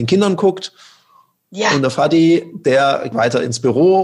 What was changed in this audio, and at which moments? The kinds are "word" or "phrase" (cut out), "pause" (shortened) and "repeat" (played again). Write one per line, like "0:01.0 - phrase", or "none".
0:03.1 - word